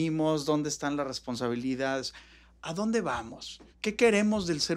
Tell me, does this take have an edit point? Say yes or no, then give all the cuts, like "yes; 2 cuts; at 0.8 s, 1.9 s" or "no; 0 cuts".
no; 0 cuts